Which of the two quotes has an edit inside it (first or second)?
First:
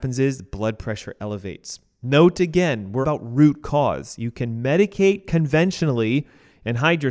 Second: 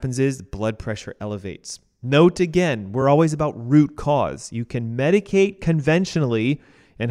first